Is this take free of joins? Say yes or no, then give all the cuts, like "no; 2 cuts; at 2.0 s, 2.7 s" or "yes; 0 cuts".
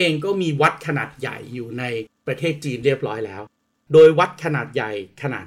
yes; 0 cuts